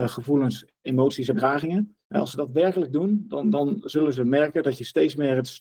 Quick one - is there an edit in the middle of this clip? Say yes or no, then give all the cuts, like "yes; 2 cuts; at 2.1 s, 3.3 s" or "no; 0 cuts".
yes; 2 cuts; at 1.3 s, 2.0 s